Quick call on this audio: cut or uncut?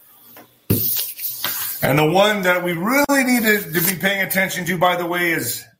uncut